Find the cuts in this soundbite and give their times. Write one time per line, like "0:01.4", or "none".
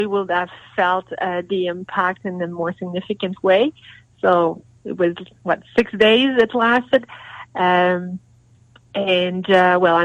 none